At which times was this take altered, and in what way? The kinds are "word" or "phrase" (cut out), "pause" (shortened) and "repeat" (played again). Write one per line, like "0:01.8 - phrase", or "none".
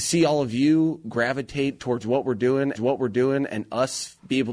0:02.7 - repeat